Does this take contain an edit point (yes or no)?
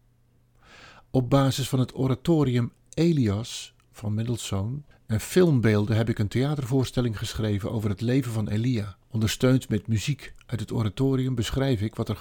yes